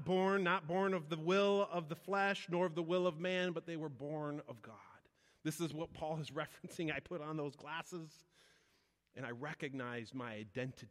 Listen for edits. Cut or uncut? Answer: uncut